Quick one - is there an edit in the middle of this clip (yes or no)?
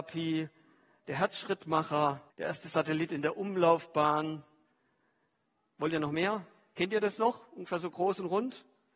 yes